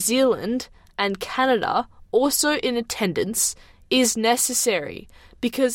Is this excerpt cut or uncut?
uncut